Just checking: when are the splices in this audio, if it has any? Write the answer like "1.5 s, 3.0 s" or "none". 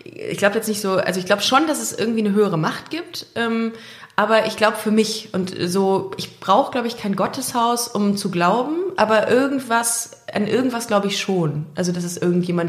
none